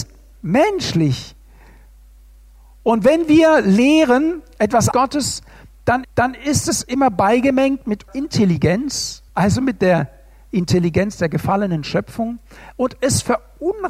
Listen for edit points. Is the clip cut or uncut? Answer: cut